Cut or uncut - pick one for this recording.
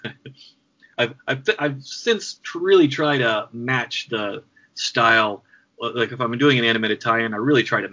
uncut